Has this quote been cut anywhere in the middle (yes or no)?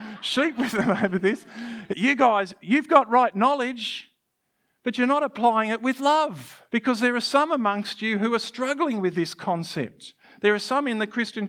yes